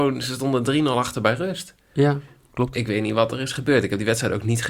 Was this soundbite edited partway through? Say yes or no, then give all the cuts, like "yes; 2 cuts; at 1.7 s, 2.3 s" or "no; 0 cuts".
no; 0 cuts